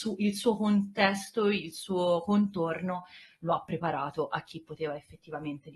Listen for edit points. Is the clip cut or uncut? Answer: uncut